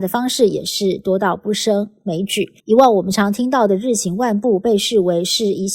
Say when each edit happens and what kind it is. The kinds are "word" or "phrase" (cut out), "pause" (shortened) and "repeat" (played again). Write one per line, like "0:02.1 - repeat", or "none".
0:02.6 - pause